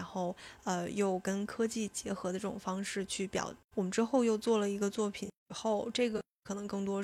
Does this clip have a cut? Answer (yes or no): yes